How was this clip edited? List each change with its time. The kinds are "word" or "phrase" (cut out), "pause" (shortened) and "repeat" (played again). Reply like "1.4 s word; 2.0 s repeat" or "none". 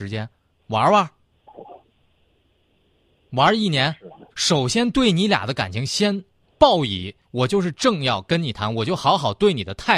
4.3 s pause; 7.2 s pause